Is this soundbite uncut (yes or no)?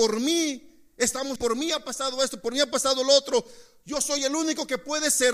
no